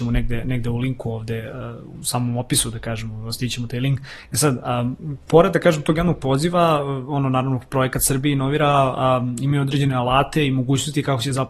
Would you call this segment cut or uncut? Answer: uncut